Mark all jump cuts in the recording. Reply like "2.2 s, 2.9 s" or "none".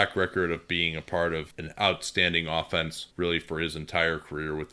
none